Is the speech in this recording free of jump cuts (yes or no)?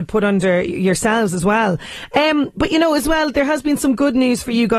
yes